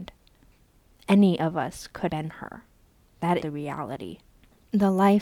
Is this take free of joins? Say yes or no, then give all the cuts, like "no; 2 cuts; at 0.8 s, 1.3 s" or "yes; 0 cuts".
no; 2 cuts; at 2.1 s, 3.4 s